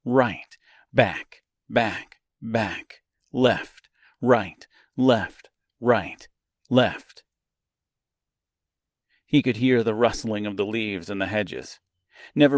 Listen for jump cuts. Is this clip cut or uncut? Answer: uncut